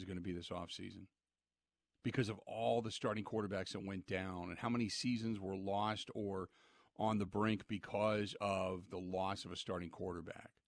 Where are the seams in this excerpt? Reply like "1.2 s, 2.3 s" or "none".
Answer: none